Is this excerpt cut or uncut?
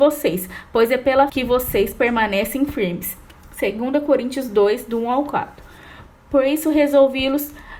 cut